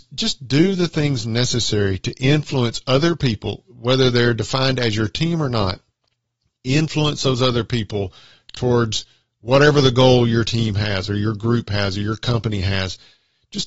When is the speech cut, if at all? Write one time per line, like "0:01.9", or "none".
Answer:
none